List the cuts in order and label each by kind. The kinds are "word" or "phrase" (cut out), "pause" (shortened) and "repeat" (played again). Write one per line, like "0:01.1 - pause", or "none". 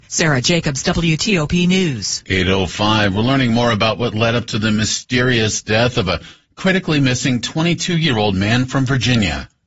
none